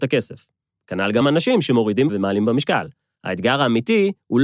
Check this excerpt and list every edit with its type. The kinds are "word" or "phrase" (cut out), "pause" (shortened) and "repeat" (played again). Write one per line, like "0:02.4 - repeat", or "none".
0:01.2 - word
0:02.1 - word